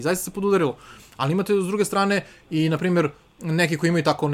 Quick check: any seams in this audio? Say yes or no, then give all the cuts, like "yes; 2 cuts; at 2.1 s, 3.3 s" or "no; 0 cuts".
no; 0 cuts